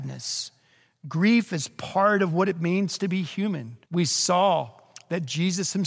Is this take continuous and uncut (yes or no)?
no